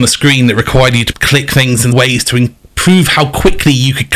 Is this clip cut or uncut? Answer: cut